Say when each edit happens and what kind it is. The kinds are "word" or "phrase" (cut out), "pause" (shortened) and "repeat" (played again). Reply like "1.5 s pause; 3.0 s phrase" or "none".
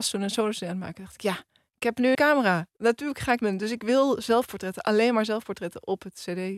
2.1 s phrase; 3.4 s word